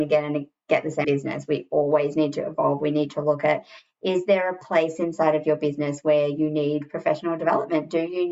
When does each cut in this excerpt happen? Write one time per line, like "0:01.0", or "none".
0:01.0